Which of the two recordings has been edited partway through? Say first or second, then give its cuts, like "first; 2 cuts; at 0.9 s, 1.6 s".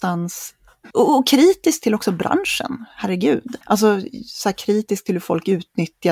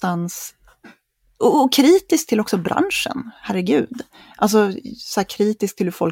first; 2 cuts; at 0.9 s, 3.6 s